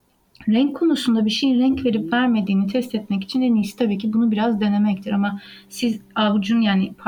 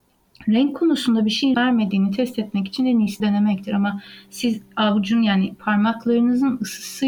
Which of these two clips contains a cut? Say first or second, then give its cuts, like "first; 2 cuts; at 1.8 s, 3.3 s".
second; 2 cuts; at 1.5 s, 3.2 s